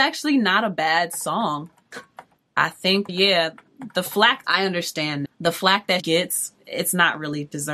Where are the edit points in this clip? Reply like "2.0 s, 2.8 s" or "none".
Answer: 2.4 s, 3.1 s, 4.4 s, 5.3 s, 6.0 s